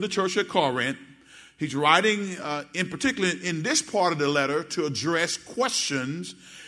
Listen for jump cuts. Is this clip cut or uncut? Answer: uncut